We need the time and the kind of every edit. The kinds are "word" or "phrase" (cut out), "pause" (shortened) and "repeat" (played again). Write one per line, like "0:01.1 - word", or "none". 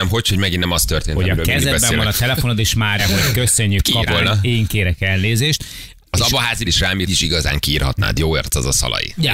0:03.0 - phrase
0:04.1 - word
0:06.6 - phrase
0:07.1 - phrase